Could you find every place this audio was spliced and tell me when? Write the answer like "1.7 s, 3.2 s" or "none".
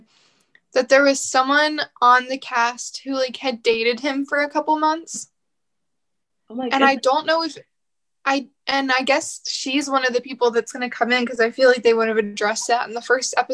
none